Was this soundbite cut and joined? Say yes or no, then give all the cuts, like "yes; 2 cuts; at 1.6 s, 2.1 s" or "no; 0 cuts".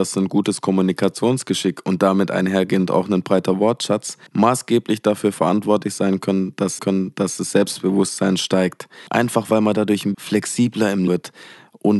yes; 5 cuts; at 4.3 s, 6.8 s, 9.1 s, 10.1 s, 11.1 s